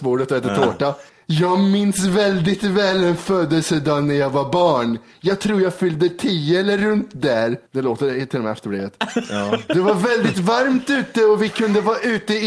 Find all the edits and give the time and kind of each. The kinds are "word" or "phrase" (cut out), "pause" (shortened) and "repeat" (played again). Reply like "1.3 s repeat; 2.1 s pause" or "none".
1.1 s pause; 7.7 s pause